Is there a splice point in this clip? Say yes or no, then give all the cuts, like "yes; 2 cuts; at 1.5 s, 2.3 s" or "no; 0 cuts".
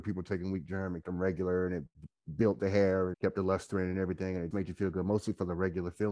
yes; 3 cuts; at 1.0 s, 3.1 s, 4.5 s